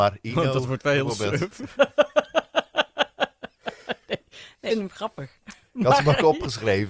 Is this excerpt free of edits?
no; 1 cut; at 4.7 s

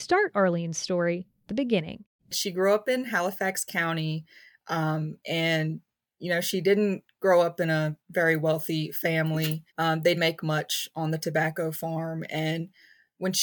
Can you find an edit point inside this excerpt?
yes; 4 cuts; at 1.5 s, 8.0 s, 9.7 s, 10.1 s

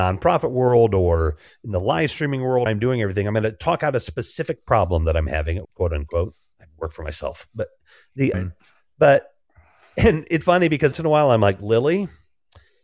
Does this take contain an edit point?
yes; 6 cuts; at 2.7 s, 5.6 s, 6.5 s, 8.3 s, 10.4 s, 10.9 s

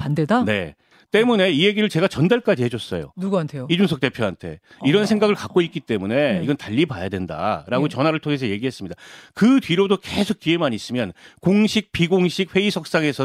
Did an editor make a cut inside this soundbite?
no; 0 cuts

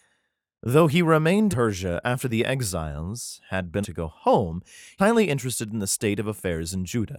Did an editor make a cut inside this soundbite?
yes; 3 cuts; at 1.5 s, 3.8 s, 5.0 s

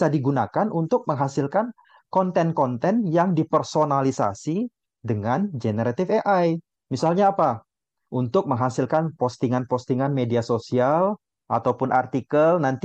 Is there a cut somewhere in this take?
no; 0 cuts

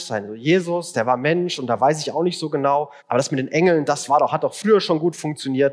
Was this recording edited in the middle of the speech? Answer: yes; 1 cut; at 3.0 s

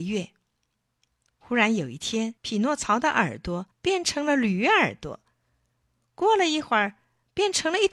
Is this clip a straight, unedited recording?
no; 2 cuts; at 2.4 s, 3.7 s

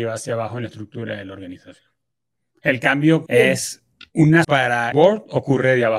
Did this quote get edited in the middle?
yes; 4 cuts; at 3.3 s, 3.9 s, 4.4 s, 4.9 s

